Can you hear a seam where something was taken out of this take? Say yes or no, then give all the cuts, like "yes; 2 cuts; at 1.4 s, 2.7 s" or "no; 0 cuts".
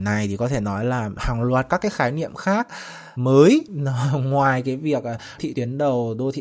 yes; 1 cut; at 5.4 s